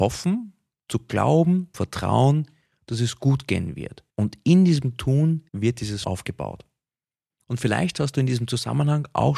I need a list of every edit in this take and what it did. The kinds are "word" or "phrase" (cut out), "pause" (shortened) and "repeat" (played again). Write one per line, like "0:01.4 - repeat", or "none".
0:01.7 - phrase
0:04.1 - pause
0:05.5 - pause
0:06.0 - phrase